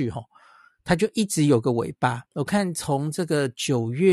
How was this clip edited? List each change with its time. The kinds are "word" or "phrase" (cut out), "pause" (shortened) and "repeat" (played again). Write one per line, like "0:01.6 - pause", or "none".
0:02.3 - pause